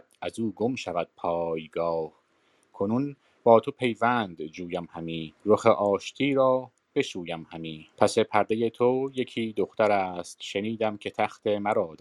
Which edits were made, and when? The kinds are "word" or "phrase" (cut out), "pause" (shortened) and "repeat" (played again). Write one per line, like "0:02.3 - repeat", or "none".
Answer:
0:05.4 - pause
0:07.9 - pause